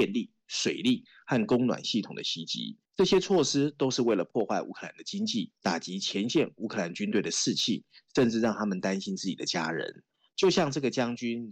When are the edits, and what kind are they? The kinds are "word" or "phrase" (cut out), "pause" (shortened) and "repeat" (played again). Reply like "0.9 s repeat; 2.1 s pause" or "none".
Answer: 2.9 s pause; 5.5 s pause